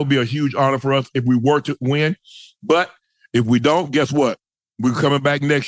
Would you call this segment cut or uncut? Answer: uncut